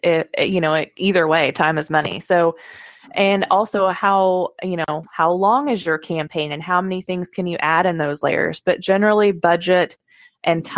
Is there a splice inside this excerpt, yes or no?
no